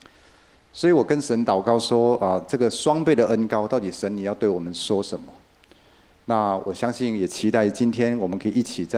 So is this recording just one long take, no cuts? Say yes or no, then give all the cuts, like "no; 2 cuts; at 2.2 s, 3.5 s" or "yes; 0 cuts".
yes; 0 cuts